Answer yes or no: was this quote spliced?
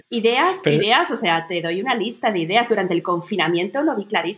no